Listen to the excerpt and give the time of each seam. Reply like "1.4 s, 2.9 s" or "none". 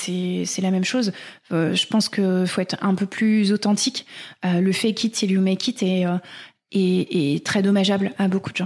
none